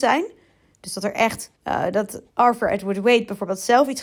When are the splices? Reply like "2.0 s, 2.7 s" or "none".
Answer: 1.5 s, 2.3 s